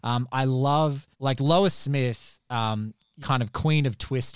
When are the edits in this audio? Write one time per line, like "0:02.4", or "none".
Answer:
0:01.1
0:03.2